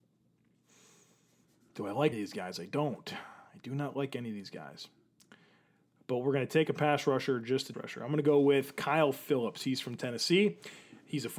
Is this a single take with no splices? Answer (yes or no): no